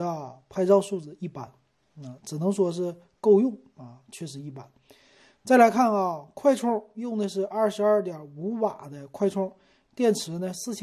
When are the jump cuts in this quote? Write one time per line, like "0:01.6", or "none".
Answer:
none